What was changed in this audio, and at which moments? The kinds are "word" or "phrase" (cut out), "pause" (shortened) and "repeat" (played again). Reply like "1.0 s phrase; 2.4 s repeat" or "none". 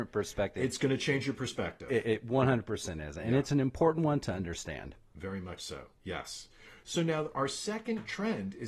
none